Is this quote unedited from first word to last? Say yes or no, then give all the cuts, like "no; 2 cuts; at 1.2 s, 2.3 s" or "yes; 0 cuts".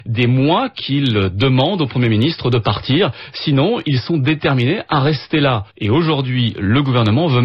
no; 1 cut; at 5.7 s